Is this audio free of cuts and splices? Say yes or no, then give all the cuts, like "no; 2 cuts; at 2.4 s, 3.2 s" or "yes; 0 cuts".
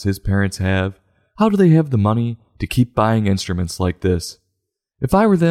yes; 0 cuts